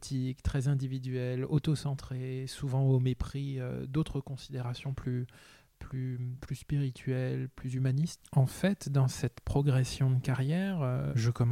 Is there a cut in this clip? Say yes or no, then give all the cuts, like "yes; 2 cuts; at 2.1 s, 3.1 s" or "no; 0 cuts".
no; 0 cuts